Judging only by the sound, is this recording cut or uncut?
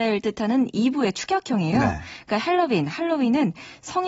uncut